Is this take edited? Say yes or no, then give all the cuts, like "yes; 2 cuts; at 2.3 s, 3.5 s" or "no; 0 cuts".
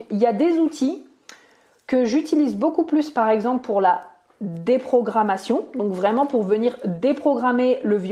no; 0 cuts